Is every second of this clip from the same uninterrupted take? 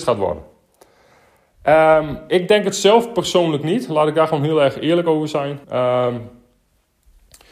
no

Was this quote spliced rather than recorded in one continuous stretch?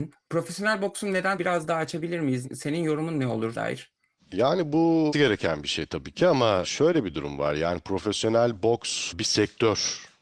yes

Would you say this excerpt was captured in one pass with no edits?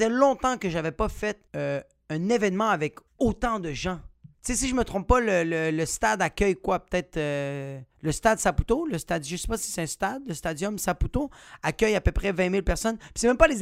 no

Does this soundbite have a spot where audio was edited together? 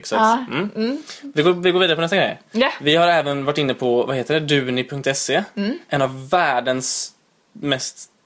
no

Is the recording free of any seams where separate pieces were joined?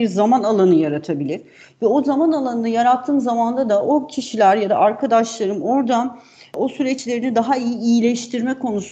yes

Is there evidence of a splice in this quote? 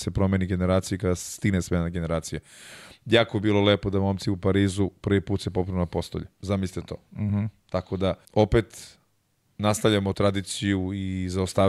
yes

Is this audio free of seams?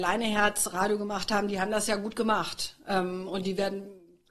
yes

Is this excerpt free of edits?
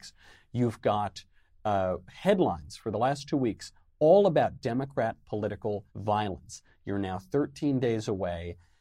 no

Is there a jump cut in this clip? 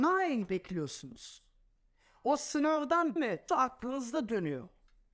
yes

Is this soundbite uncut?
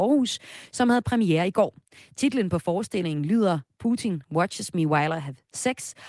yes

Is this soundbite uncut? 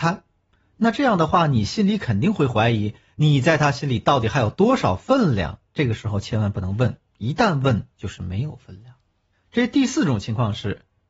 no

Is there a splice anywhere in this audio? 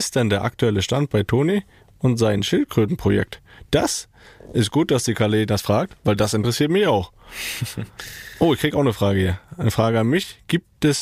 no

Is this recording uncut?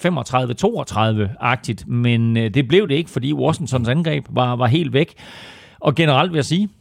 yes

